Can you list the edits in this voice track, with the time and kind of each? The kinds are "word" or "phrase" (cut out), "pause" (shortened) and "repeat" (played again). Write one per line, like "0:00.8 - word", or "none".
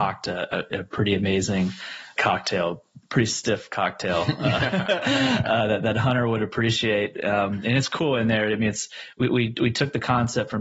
0:02.2 - word